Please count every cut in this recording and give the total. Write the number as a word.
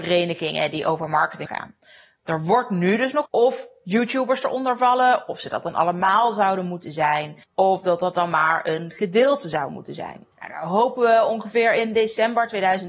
four